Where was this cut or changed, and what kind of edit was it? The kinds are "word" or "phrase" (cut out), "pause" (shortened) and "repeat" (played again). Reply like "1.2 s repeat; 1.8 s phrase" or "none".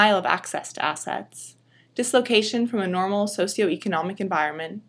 none